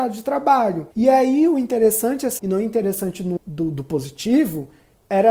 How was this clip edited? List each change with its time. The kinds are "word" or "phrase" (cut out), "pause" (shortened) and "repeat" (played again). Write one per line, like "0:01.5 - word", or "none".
0:00.9 - pause
0:02.4 - word
0:03.4 - word